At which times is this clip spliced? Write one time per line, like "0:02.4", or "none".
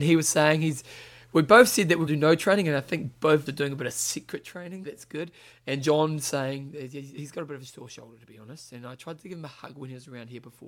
0:02.1
0:03.5
0:04.8